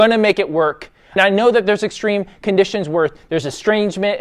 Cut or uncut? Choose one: cut